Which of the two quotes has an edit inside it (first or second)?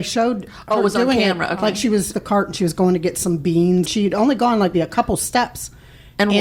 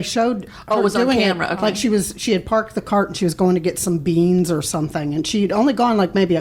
first